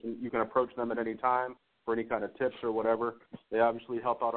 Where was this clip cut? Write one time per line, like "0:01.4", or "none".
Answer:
none